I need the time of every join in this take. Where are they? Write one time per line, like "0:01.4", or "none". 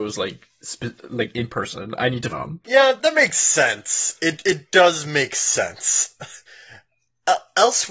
0:02.3
0:03.0
0:06.5